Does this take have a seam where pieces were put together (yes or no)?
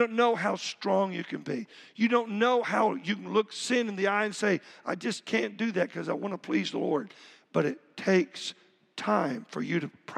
no